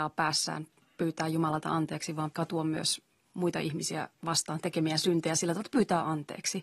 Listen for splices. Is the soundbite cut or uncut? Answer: cut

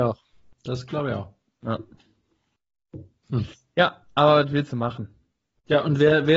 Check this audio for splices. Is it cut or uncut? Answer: uncut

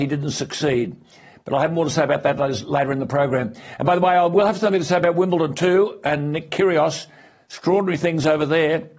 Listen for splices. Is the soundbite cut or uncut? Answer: uncut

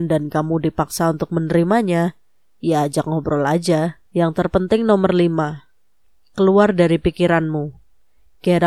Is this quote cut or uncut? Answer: cut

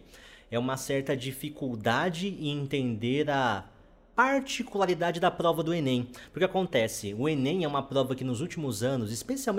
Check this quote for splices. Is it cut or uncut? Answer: uncut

